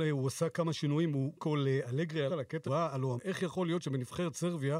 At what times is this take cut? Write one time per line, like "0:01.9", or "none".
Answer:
0:01.4
0:02.3
0:02.6
0:03.2